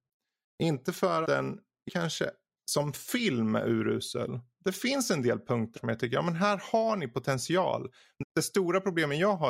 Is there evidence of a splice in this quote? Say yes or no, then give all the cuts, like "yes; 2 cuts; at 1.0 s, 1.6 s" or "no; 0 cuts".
yes; 4 cuts; at 1.2 s, 1.9 s, 5.8 s, 8.2 s